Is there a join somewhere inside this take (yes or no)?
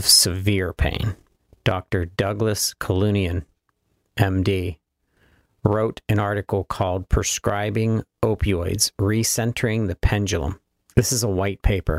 no